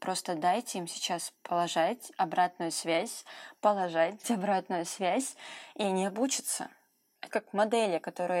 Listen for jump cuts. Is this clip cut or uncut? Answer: cut